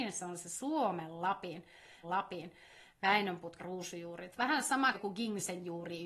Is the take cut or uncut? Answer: cut